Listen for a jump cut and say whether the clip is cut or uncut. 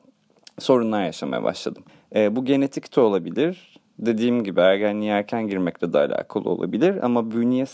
cut